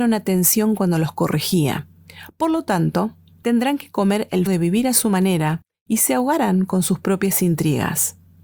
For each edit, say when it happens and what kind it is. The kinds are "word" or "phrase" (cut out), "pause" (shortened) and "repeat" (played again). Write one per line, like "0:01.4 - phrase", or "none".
0:04.5 - phrase